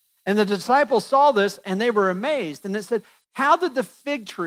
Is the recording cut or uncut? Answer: uncut